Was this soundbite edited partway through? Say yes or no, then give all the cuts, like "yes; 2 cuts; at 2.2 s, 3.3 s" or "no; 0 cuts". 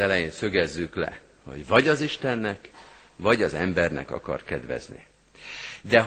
no; 0 cuts